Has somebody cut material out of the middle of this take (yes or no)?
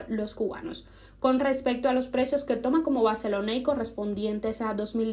no